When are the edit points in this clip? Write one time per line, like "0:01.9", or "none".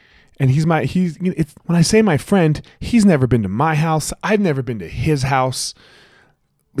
0:01.6